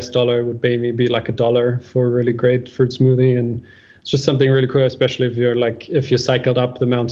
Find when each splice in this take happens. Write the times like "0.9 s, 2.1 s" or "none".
none

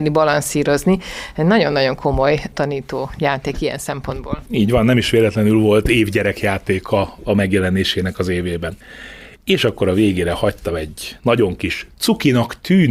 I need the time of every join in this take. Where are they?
none

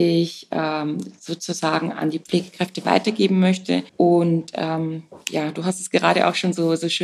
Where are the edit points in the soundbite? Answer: 3.9 s

